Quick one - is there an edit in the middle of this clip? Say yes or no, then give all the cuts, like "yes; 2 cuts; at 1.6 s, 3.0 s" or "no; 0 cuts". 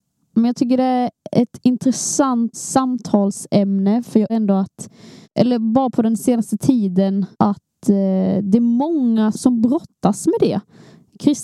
yes; 5 cuts; at 2.5 s, 4.3 s, 5.2 s, 7.3 s, 9.3 s